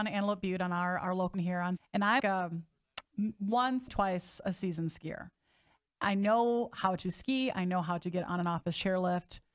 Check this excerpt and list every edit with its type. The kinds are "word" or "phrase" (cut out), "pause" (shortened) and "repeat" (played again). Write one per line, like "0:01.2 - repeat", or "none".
0:01.3 - word
0:01.8 - word
0:02.2 - word
0:03.9 - word